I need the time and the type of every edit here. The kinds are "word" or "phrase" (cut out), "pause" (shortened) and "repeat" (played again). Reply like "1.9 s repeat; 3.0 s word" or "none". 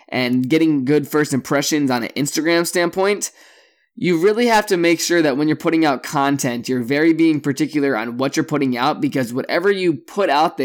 none

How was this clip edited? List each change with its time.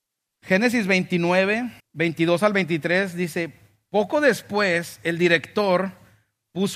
1.8 s pause

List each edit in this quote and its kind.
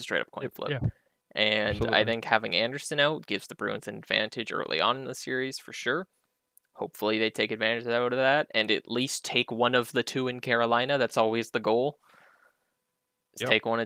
none

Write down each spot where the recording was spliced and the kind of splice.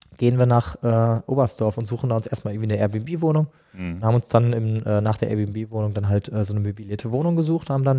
none

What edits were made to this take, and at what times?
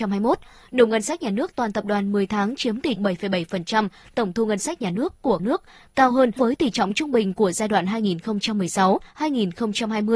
3.0 s word; 5.4 s word; 6.4 s word

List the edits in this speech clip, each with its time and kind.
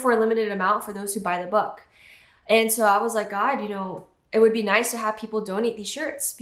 none

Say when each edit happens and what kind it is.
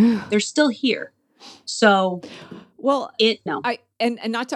3.5 s word

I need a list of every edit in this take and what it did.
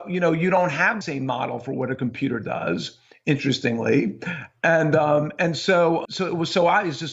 1.0 s word; 6.0 s word

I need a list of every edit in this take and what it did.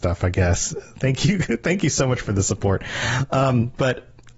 none

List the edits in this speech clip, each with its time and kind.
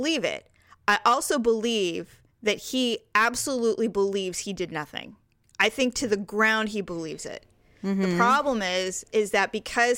none

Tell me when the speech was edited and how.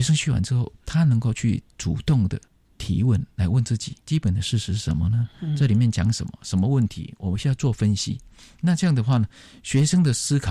4.0 s pause

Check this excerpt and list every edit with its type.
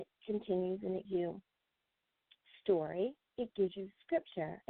1.0 s word; 3.2 s pause

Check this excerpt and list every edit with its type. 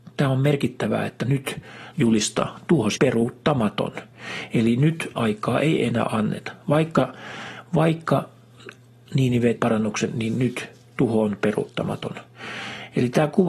1.9 s word; 2.9 s word; 5.2 s word; 9.6 s word

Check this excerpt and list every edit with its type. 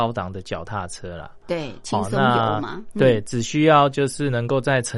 none

